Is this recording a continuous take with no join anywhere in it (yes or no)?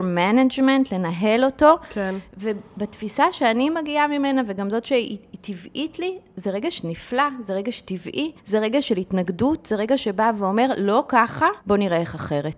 no